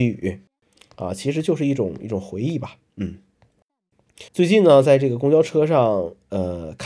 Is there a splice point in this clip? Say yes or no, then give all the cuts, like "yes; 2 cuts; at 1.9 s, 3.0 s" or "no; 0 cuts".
yes; 1 cut; at 4.3 s